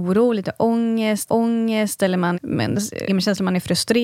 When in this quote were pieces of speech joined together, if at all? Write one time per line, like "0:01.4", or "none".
0:01.3
0:02.3
0:03.1